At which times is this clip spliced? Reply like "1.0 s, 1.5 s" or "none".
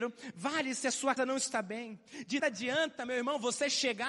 1.2 s, 2.4 s